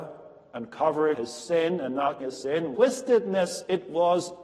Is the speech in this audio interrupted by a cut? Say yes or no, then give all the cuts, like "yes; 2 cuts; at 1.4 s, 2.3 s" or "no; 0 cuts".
yes; 3 cuts; at 1.1 s, 2.2 s, 2.8 s